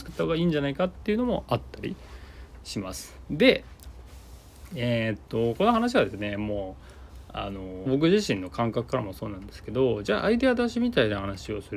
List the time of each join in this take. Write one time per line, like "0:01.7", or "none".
0:07.9